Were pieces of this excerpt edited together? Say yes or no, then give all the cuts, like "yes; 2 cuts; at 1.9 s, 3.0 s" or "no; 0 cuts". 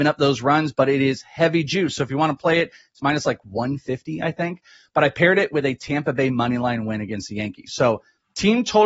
no; 0 cuts